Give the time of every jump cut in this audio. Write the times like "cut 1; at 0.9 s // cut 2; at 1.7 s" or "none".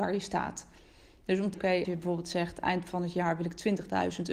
cut 1; at 1.5 s // cut 2; at 1.8 s